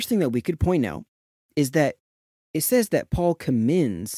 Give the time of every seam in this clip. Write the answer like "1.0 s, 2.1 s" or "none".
none